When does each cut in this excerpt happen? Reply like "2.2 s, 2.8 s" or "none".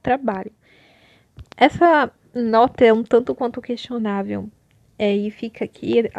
none